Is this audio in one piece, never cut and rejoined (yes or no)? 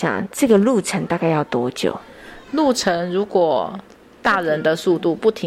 yes